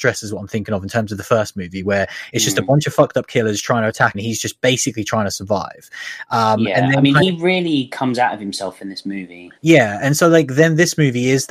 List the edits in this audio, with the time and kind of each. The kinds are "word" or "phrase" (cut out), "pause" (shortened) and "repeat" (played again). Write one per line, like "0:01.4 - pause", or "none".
0:04.1 - word
0:09.6 - pause